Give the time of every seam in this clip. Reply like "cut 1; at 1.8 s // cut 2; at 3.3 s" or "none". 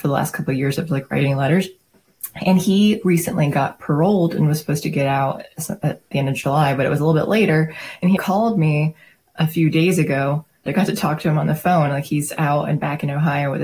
cut 1; at 6.1 s // cut 2; at 8.2 s // cut 3; at 10.7 s